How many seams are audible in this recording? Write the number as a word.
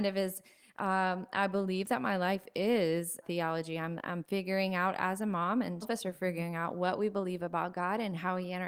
two